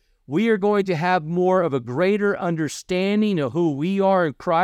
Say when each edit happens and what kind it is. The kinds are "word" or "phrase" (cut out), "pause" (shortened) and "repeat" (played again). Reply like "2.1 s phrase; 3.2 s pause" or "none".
none